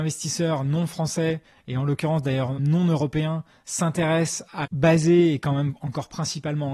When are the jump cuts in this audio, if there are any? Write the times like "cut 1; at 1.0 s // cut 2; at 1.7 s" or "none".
cut 1; at 2.6 s // cut 2; at 4.6 s